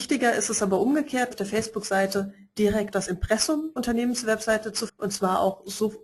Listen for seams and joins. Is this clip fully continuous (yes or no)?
no